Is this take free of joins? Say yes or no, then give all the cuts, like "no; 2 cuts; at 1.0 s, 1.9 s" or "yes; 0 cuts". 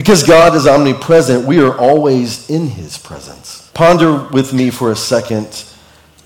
no; 1 cut; at 3.7 s